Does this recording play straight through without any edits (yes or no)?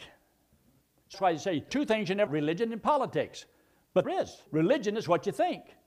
no